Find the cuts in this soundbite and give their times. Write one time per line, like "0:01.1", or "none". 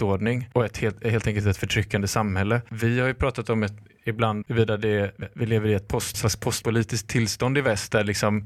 0:04.4
0:05.2
0:06.1